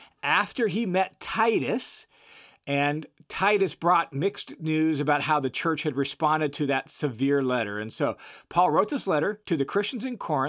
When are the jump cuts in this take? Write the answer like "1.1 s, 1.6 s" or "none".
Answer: none